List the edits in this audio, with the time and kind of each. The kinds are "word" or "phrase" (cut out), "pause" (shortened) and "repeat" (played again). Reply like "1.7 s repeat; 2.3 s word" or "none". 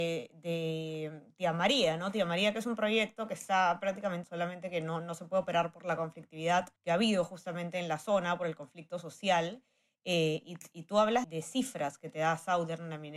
4.2 s word; 6.8 s pause; 11.2 s word